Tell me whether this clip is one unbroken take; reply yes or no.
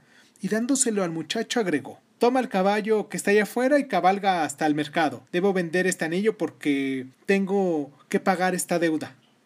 no